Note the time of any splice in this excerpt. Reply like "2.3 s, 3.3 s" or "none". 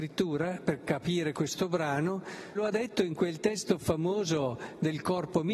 2.5 s